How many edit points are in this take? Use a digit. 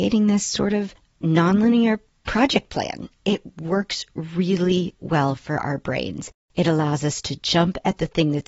0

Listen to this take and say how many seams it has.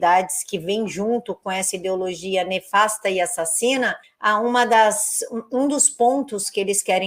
1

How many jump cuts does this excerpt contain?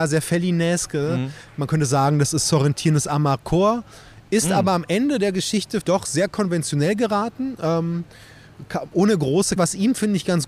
2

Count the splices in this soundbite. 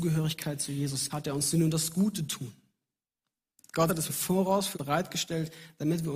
4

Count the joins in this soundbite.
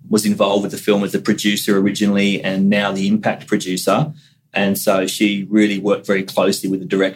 0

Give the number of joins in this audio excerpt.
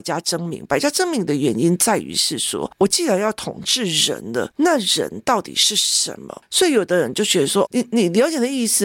1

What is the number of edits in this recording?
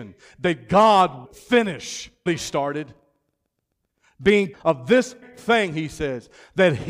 4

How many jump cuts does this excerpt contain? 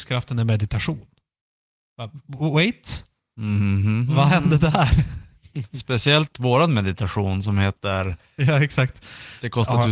0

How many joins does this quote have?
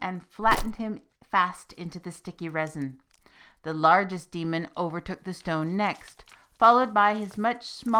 0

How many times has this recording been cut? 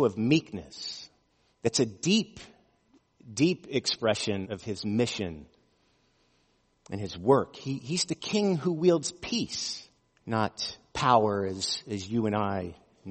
3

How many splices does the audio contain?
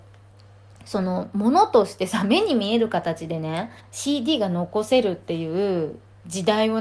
1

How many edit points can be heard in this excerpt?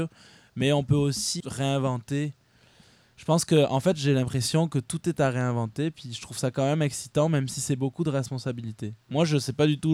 1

